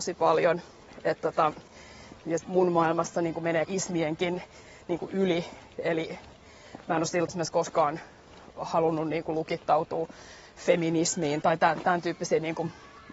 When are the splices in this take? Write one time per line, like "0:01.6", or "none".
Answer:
0:02.4
0:03.7
0:07.3
0:11.4